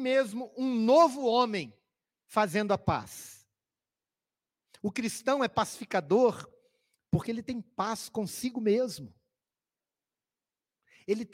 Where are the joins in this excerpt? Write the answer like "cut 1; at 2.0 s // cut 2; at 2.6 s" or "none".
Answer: none